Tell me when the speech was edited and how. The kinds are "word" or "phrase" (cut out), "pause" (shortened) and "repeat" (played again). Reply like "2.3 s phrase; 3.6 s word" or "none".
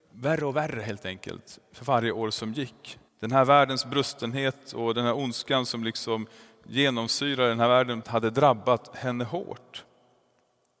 3.1 s pause; 8.0 s phrase